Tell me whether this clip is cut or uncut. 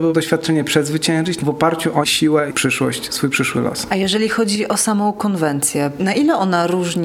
cut